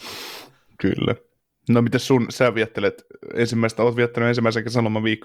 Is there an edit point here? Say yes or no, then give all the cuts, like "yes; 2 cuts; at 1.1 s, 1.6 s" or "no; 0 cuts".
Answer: no; 0 cuts